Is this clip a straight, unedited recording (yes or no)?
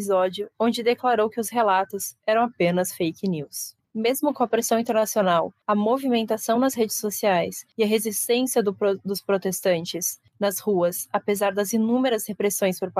yes